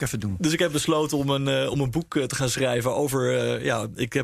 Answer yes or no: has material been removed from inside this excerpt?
no